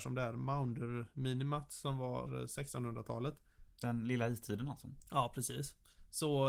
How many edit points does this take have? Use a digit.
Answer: 1